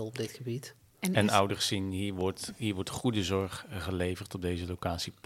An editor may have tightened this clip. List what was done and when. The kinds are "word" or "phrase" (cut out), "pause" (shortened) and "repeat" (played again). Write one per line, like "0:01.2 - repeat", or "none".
none